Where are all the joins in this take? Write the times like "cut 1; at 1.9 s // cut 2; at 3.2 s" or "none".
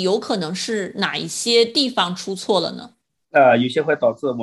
cut 1; at 3.1 s